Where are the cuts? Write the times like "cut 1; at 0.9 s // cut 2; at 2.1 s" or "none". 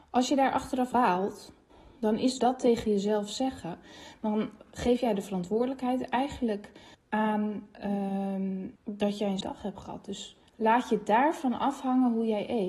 cut 1; at 0.9 s // cut 2; at 1.7 s // cut 3; at 2.4 s // cut 4; at 6.9 s // cut 5; at 8.8 s // cut 6; at 9.4 s // cut 7; at 10.5 s